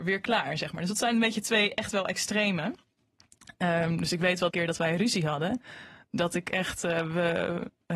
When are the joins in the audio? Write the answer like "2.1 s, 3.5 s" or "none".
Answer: 4.5 s